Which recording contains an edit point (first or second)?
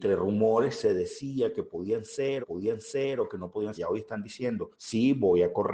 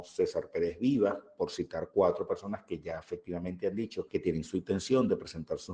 first